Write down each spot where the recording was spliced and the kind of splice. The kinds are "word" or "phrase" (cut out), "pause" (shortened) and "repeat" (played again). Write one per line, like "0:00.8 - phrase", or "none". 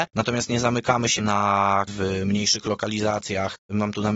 0:01.2 - word
0:01.9 - word